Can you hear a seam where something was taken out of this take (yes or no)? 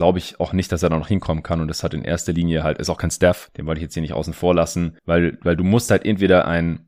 no